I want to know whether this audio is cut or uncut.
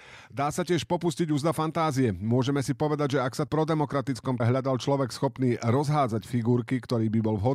cut